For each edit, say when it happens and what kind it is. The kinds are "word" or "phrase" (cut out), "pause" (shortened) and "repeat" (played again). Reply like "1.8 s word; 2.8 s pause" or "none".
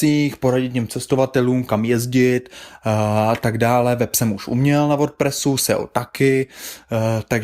none